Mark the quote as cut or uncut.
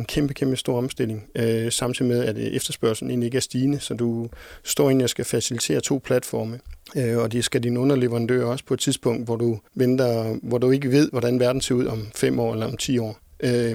cut